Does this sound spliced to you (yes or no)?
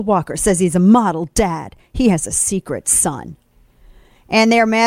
no